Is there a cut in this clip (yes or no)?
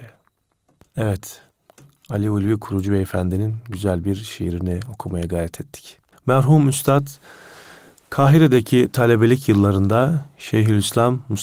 no